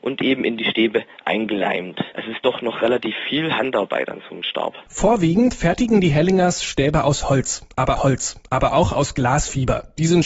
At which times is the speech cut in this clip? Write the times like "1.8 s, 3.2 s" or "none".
8.0 s